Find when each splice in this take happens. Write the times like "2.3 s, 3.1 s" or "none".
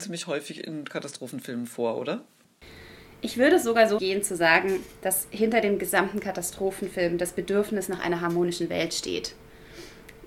4.0 s

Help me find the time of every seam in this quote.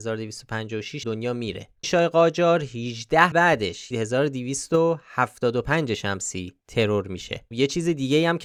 1.0 s, 1.8 s, 3.3 s, 3.9 s, 6.6 s, 7.5 s

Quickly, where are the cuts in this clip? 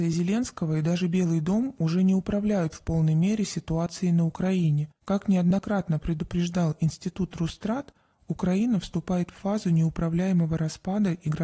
5.0 s

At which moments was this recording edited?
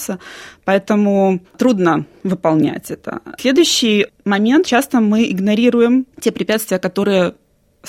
1.4 s, 4.6 s, 6.1 s

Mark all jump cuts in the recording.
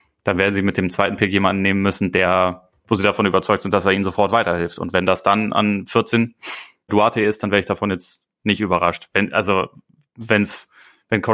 6.9 s

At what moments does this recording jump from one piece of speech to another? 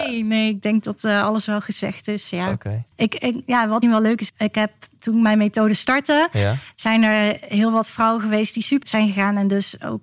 2.9 s, 3.8 s, 4.3 s, 8.8 s

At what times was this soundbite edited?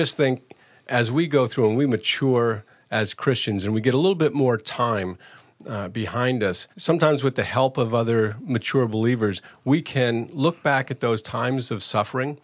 6.7 s

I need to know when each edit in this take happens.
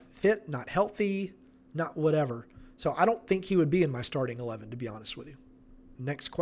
none

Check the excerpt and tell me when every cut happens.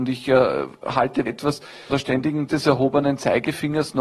1.3 s, 1.9 s, 2.5 s

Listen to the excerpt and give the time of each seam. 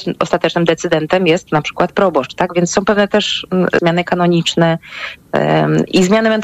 3.8 s

